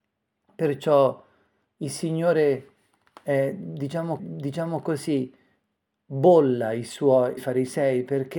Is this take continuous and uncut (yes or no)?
no